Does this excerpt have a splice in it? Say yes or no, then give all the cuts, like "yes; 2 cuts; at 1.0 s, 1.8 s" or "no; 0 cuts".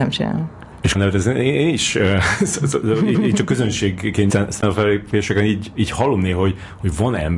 yes; 3 cuts; at 0.9 s, 3.1 s, 4.3 s